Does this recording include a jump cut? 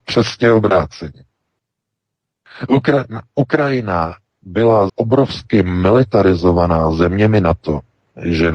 yes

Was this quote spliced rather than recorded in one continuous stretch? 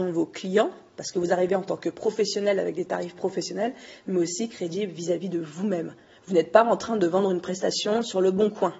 no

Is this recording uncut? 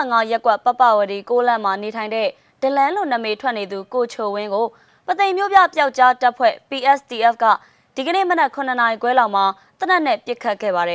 yes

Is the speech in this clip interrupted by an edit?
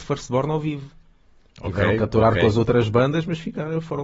no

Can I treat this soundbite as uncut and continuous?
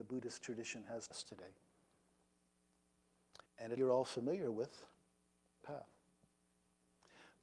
no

